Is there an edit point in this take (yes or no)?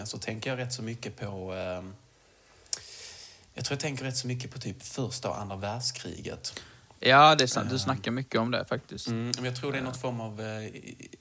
no